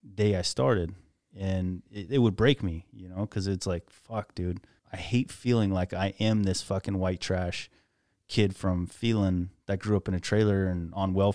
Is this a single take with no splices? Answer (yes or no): no